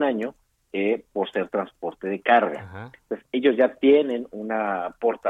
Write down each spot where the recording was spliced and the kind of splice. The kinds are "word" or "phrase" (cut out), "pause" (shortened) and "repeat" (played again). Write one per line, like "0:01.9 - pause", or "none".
none